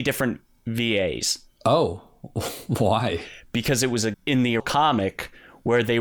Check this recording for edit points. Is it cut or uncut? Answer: cut